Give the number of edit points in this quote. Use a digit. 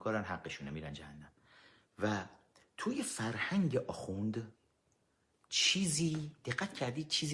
0